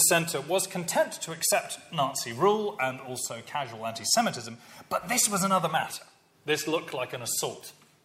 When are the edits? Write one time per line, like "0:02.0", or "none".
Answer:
none